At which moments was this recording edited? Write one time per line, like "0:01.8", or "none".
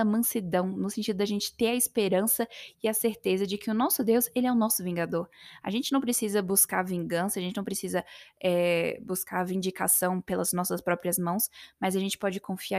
none